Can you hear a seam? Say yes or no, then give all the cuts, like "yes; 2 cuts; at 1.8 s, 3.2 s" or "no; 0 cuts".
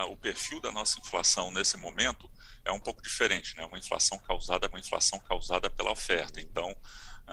yes; 1 cut; at 4.7 s